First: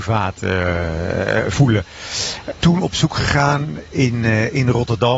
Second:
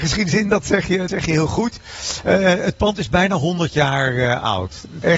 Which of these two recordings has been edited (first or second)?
second